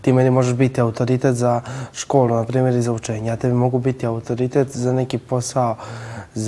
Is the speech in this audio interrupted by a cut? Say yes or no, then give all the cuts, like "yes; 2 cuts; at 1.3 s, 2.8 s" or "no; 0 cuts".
no; 0 cuts